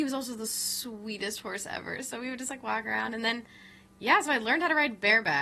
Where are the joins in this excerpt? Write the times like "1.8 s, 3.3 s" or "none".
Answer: none

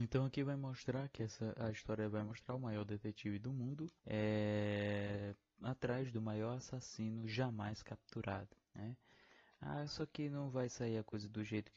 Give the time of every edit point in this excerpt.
4.0 s, 8.6 s

